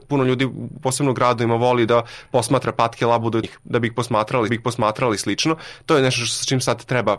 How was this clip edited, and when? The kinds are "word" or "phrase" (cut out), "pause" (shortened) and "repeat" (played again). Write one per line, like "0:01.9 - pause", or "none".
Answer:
0:03.4 - phrase
0:04.5 - repeat